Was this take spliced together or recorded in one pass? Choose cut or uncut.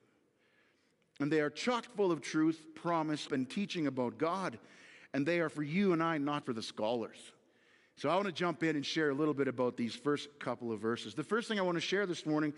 cut